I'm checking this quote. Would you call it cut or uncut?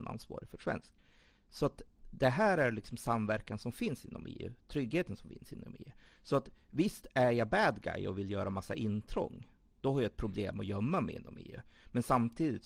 uncut